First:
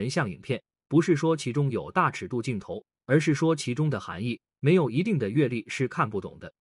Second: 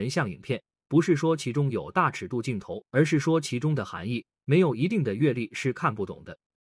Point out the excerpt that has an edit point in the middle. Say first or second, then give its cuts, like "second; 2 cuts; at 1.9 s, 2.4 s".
second; 1 cut; at 2.8 s